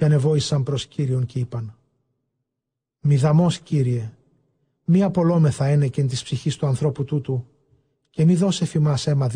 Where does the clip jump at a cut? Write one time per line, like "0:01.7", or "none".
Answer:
none

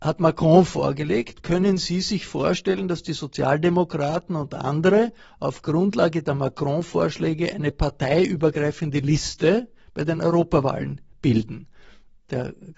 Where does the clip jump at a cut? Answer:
none

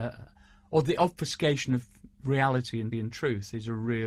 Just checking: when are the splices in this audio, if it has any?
0:02.1
0:02.9

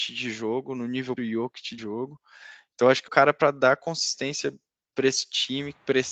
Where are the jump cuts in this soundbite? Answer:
0:01.2
0:01.8
0:03.1

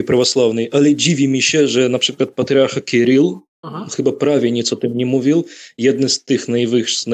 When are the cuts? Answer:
none

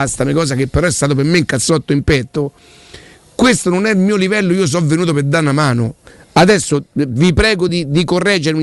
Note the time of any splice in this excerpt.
none

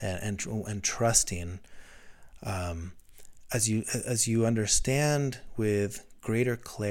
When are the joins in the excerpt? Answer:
none

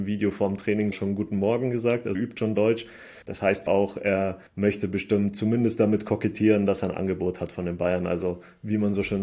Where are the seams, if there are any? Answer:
0:00.9
0:02.1
0:03.2
0:03.7
0:04.5

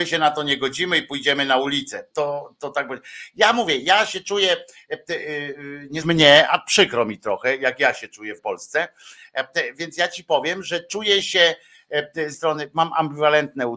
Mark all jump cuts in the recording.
0:02.1
0:06.0
0:08.4
0:12.3

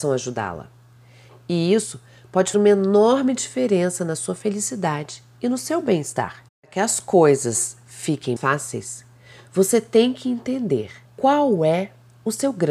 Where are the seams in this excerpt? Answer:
0:02.5
0:06.5
0:08.4
0:11.0

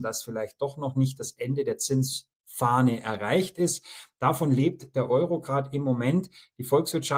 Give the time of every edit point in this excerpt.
0:02.3

